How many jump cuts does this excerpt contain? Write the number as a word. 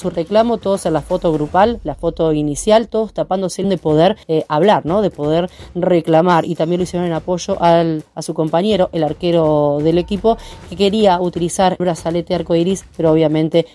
three